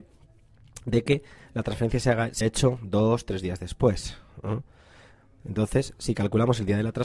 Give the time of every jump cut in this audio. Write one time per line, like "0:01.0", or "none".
0:02.4